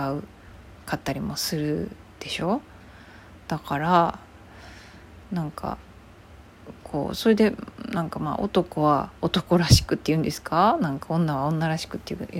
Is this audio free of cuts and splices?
no; 1 cut; at 9.2 s

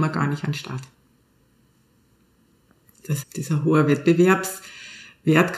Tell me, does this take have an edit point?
yes; 1 cut; at 3.2 s

